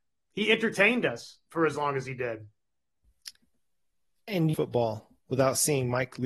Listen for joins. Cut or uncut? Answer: cut